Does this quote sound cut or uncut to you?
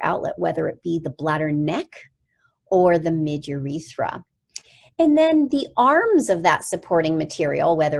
uncut